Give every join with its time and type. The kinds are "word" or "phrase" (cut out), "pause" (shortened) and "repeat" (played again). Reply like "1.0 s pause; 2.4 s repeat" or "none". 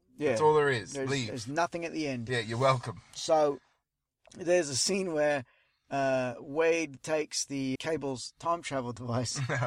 7.8 s word